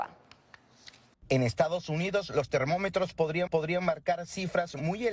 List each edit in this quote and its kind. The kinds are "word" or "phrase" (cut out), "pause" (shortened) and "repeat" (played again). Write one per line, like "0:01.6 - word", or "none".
0:01.1 - pause
0:03.5 - repeat